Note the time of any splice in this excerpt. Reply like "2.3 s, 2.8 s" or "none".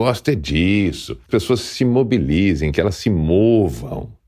1.3 s